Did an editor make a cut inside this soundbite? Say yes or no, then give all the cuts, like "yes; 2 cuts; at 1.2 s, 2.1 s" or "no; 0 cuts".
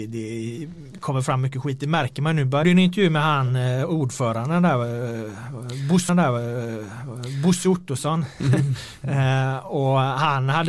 yes; 2 cuts; at 2.6 s, 6.1 s